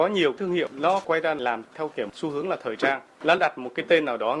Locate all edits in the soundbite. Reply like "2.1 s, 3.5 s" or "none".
none